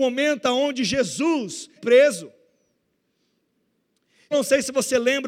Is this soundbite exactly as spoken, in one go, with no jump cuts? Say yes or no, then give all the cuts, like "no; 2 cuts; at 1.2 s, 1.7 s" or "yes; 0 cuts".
no; 2 cuts; at 1.8 s, 4.3 s